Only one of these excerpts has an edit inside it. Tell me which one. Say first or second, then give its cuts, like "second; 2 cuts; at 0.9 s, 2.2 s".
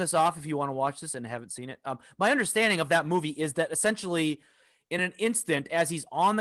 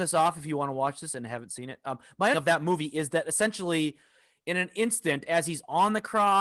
second; 1 cut; at 2.3 s